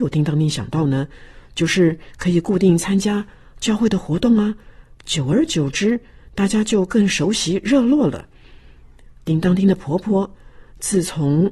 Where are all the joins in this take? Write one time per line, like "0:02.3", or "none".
none